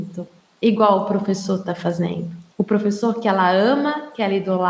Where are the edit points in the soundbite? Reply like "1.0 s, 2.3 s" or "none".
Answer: 2.5 s